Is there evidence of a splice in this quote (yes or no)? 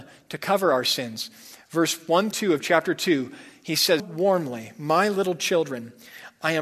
yes